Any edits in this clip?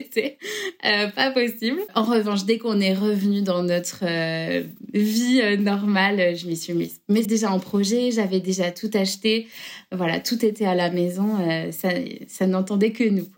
yes; 1 cut; at 7.3 s

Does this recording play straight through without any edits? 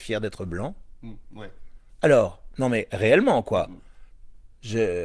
yes; 0 cuts

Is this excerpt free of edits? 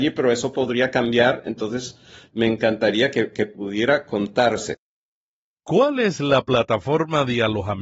yes; 0 cuts

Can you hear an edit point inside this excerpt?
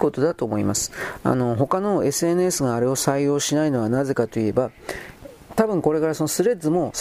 no; 0 cuts

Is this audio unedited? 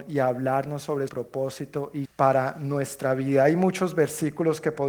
no; 2 cuts; at 1.1 s, 2.1 s

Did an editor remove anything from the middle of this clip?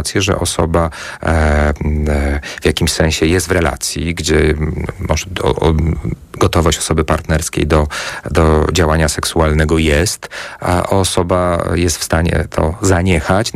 no; 0 cuts

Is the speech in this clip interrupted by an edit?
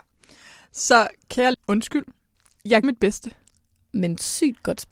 yes; 2 cuts; at 1.5 s, 2.8 s

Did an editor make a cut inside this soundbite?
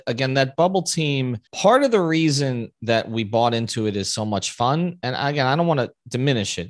yes; 1 cut; at 1.5 s

